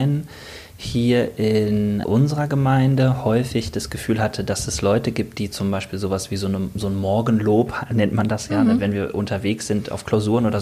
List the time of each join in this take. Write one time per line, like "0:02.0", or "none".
0:02.0